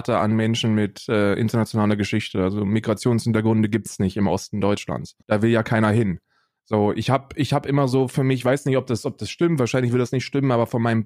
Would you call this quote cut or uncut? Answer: cut